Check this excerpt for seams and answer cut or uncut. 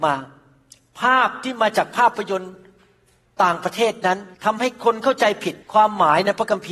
cut